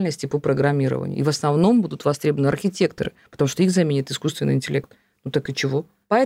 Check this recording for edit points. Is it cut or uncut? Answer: uncut